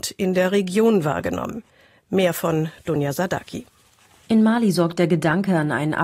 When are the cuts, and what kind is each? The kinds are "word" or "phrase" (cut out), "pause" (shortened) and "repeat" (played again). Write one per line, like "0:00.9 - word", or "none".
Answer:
none